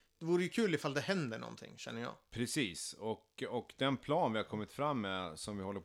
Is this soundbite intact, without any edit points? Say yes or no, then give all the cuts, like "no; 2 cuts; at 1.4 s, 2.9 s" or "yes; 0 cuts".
yes; 0 cuts